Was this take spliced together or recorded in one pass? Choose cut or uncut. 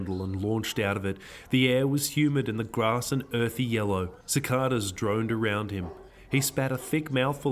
cut